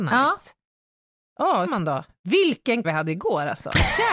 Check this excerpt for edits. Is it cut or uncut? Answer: cut